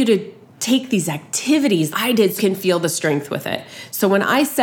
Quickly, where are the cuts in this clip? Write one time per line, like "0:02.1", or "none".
0:01.9
0:02.4

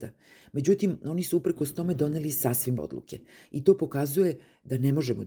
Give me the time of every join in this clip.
0:02.8

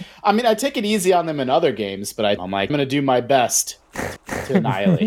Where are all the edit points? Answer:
0:02.4
0:02.7
0:04.2

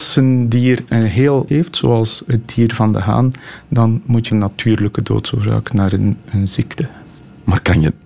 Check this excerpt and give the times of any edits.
0:01.5
0:04.3

